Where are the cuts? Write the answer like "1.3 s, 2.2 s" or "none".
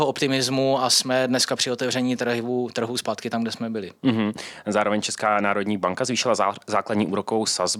none